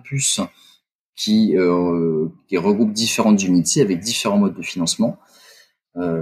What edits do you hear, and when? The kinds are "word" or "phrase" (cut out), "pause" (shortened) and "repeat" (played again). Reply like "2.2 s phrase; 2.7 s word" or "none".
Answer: none

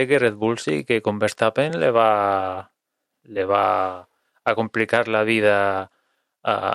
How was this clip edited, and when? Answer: none

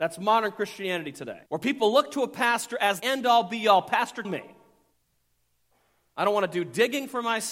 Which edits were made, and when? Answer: 1.5 s pause; 3.0 s word; 4.2 s word

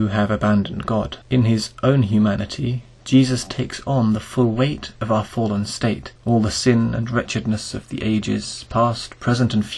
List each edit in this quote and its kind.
1.2 s pause; 6.2 s pause

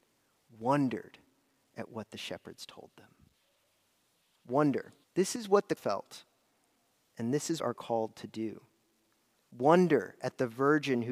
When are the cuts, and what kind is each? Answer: 5.0 s pause; 5.8 s word; 7.6 s phrase

